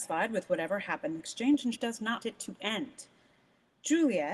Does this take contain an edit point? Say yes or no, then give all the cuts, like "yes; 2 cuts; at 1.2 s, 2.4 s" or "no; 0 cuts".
yes; 3 cuts; at 1.2 s, 1.7 s, 2.2 s